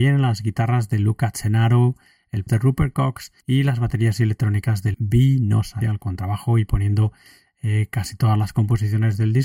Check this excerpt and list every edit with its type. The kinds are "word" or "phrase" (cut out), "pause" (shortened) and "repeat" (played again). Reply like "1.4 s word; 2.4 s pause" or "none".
2.5 s phrase; 3.4 s pause; 4.9 s word; 5.8 s word